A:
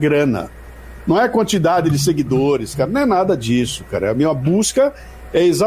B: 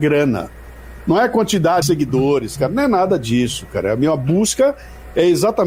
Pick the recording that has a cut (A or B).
B